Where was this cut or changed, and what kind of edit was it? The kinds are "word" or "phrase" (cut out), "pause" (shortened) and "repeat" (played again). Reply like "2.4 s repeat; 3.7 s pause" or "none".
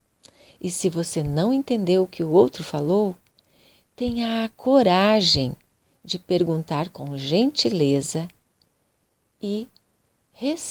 none